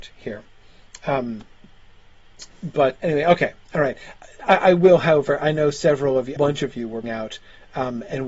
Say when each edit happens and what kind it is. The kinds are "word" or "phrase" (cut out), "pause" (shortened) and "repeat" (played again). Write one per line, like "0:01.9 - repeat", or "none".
0:03.0 - word
0:06.4 - phrase
0:07.0 - word